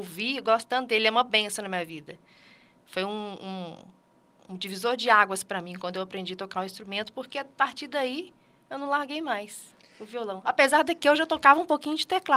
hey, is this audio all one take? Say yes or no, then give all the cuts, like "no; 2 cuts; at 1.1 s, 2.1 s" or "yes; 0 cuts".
yes; 0 cuts